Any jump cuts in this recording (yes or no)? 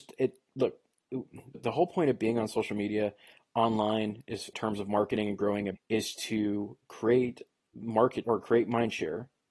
yes